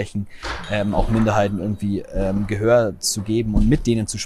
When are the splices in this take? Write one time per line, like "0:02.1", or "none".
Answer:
none